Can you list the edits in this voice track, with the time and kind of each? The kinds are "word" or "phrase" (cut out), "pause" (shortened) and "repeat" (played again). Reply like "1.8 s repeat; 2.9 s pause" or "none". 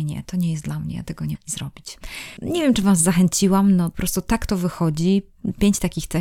1.3 s word